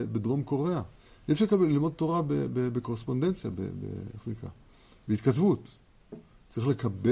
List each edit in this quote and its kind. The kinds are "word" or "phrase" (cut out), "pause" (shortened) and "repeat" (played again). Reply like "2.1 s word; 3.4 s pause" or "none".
1.0 s pause